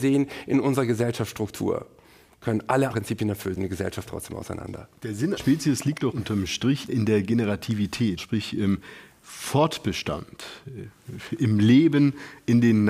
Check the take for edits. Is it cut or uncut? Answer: cut